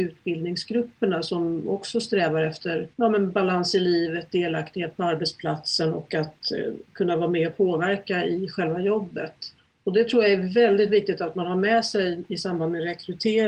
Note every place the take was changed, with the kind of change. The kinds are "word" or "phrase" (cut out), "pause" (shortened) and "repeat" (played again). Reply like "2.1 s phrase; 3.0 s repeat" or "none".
2.9 s pause; 9.6 s pause